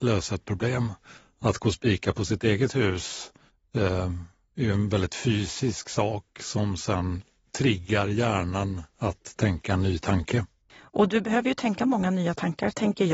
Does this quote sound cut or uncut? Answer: uncut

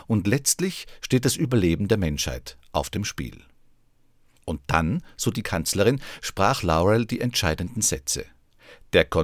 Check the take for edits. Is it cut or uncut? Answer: uncut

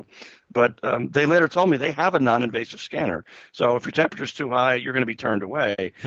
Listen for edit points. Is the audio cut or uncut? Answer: uncut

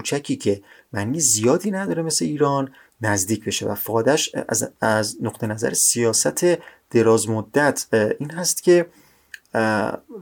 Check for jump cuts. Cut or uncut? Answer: uncut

